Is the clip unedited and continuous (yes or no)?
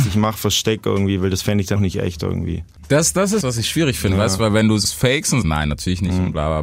no